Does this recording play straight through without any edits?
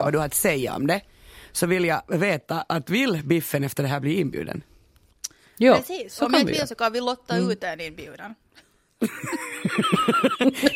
yes; 0 cuts

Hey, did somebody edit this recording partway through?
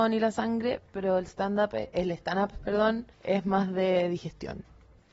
yes; 1 cut; at 3.1 s

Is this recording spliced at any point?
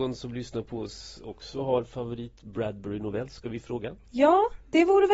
yes; 1 cut; at 4.0 s

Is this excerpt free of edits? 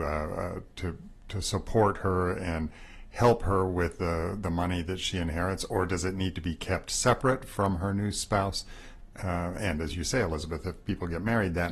yes; 0 cuts

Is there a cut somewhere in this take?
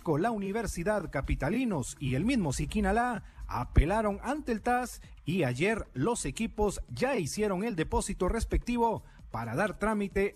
no; 0 cuts

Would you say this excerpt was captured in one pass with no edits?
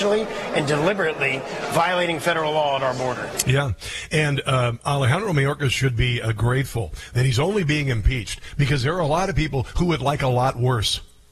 yes; 0 cuts

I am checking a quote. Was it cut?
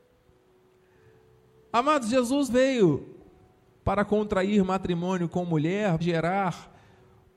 yes; 2 cuts; at 2.5 s, 6.0 s

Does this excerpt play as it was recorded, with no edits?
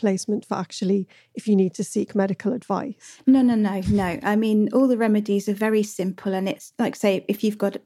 yes; 0 cuts

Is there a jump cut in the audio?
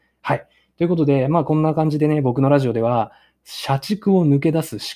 no; 0 cuts

